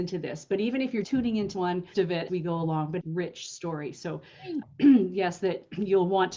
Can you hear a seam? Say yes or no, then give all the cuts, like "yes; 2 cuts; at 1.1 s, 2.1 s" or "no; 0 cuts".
yes; 6 cuts; at 1.0 s, 1.5 s, 1.9 s, 2.3 s, 3.0 s, 4.6 s